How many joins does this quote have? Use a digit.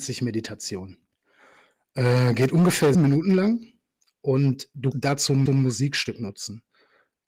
3